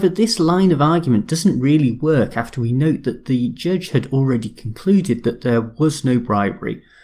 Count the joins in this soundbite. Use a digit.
0